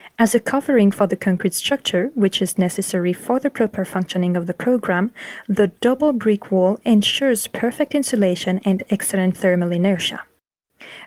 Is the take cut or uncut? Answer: uncut